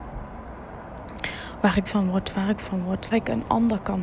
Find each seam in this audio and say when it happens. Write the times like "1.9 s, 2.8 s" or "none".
1.9 s, 2.6 s, 3.1 s